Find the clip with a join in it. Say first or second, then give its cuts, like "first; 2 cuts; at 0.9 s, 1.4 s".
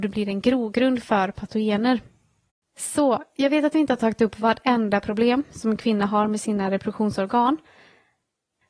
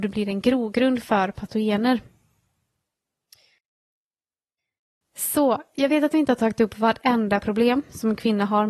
first; 1 cut; at 2.5 s